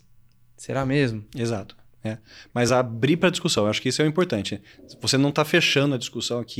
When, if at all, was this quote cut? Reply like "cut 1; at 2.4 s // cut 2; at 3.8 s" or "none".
none